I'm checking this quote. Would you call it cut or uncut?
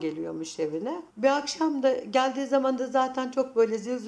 cut